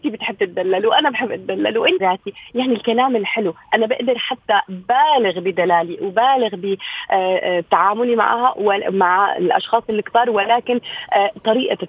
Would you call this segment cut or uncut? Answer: cut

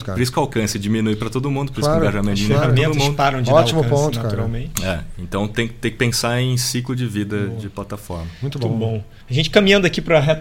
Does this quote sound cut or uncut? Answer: cut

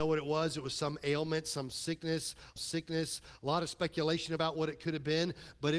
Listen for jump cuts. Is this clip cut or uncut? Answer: cut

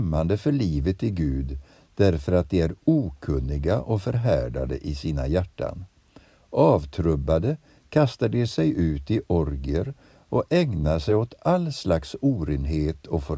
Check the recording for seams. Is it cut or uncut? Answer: uncut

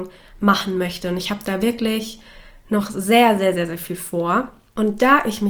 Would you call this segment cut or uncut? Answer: uncut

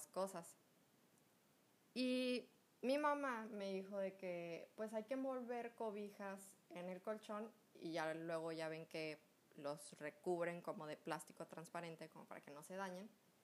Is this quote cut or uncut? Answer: uncut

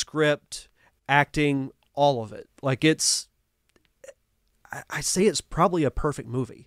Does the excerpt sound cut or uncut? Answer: uncut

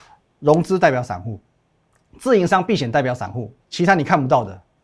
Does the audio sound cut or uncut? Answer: cut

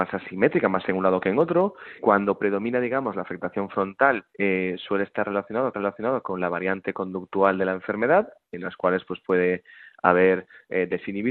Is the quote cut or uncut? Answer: cut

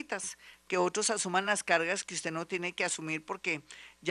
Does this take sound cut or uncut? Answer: uncut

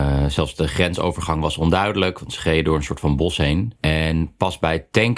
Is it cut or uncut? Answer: cut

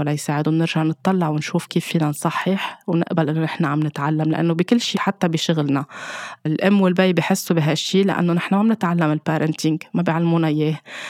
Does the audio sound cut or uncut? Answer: cut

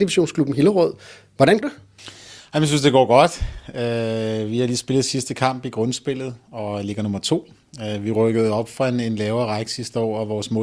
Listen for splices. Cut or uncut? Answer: cut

